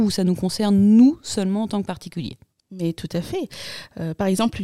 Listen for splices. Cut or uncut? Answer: uncut